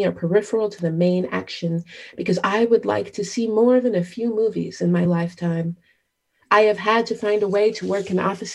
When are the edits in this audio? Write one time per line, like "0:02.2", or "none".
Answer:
none